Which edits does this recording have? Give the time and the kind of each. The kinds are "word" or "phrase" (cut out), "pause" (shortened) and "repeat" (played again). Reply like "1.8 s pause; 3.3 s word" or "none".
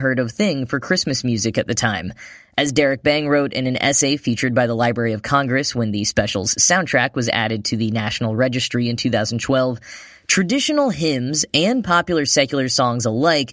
none